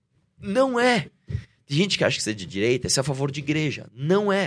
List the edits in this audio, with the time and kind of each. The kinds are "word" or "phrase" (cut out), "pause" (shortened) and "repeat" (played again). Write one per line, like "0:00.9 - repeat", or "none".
none